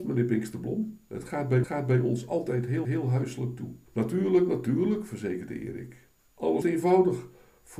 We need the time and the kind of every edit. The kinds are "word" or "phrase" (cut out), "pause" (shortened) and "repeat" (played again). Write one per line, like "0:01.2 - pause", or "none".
0:01.6 - repeat
0:02.8 - repeat
0:03.9 - pause
0:06.6 - word